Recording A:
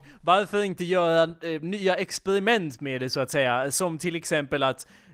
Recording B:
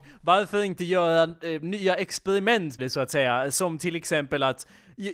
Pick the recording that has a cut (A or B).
B